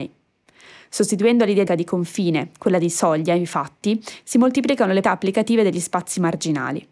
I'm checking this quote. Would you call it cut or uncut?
cut